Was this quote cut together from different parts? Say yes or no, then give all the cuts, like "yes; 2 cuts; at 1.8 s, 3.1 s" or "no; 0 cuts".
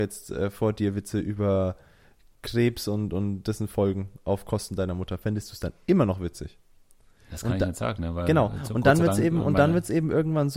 no; 0 cuts